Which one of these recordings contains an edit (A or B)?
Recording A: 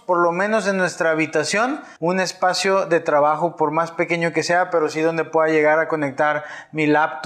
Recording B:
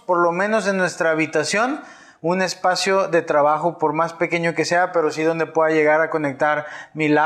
A